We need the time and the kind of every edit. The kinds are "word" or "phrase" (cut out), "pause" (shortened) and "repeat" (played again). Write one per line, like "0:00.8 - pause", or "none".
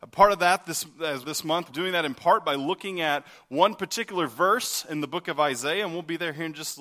0:01.2 - word
0:01.7 - word

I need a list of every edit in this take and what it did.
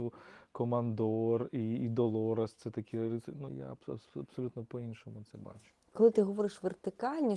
0:03.5 - word
0:05.3 - word

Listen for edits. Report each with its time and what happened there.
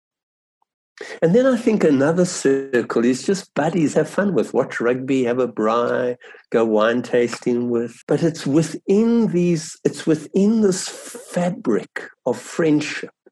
0:03.9 - phrase
0:08.0 - pause

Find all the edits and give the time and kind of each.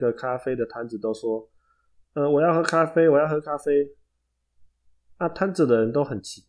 none

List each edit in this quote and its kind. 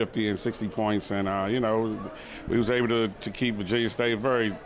none

